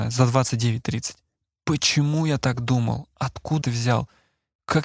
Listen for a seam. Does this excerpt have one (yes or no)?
yes